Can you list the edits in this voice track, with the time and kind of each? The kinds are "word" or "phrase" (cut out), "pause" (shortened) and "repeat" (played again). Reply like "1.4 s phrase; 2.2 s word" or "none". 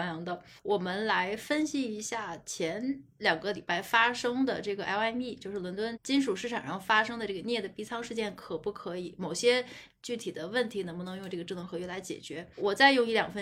none